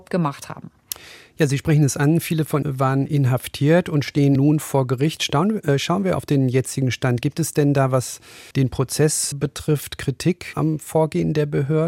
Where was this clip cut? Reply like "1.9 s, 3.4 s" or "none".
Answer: 2.6 s, 3.1 s, 4.4 s, 8.5 s, 9.3 s, 10.5 s